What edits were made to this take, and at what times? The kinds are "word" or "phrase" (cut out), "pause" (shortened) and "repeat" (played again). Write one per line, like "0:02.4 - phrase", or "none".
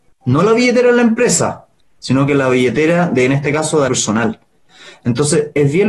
0:03.9 - word